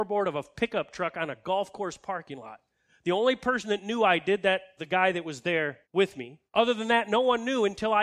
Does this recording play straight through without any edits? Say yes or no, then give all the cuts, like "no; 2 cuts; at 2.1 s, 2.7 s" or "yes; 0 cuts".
no; 3 cuts; at 4.8 s, 5.8 s, 6.5 s